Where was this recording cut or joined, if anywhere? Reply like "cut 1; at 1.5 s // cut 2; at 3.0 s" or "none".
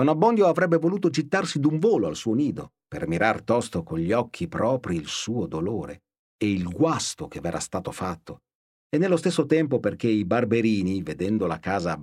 none